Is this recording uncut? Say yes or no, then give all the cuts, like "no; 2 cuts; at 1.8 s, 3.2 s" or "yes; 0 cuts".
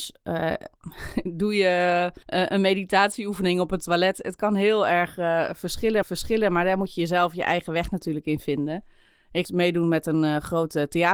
no; 3 cuts; at 2.2 s, 6.0 s, 9.4 s